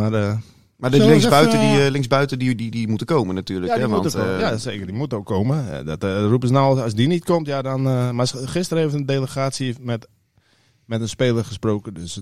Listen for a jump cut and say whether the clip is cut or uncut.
uncut